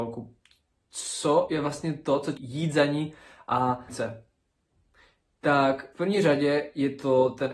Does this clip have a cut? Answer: yes; 3 cuts; at 2.4 s, 3.9 s, 5.9 s

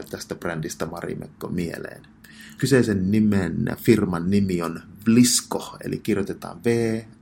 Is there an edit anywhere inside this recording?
yes; 1 cut; at 2.6 s

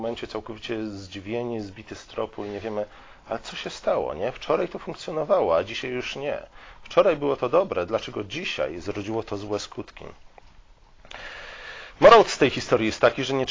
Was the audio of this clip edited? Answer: no; 0 cuts

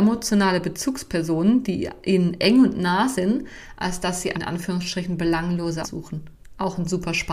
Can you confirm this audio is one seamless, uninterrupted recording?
no; 2 cuts; at 4.3 s, 5.8 s

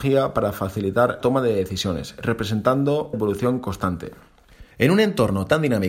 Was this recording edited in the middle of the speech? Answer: yes; 3 cuts; at 1.2 s, 3.1 s, 4.7 s

